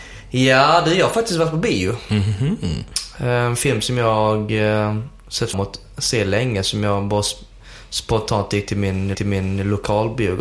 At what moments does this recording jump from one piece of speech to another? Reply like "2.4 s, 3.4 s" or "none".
5.5 s, 9.1 s